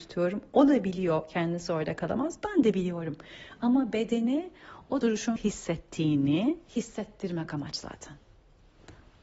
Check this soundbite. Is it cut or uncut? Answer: cut